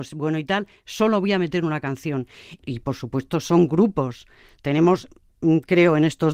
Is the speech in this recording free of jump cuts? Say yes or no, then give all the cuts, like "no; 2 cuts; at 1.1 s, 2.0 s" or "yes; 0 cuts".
yes; 0 cuts